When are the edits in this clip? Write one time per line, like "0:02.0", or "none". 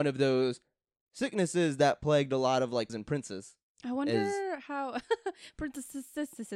0:02.9